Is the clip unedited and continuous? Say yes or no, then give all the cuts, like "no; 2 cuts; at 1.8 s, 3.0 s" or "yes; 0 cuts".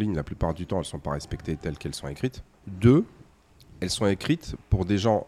no; 1 cut; at 2.5 s